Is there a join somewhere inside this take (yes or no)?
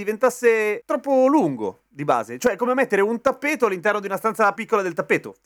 yes